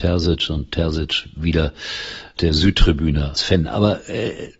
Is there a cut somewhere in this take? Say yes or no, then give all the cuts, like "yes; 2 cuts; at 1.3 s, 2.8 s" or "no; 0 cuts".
yes; 2 cuts; at 2.4 s, 3.4 s